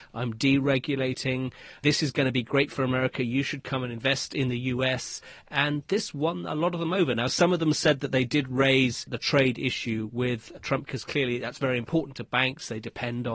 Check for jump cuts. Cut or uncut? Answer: uncut